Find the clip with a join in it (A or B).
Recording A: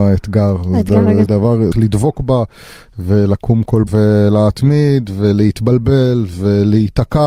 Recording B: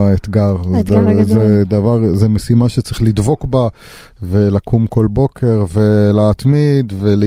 A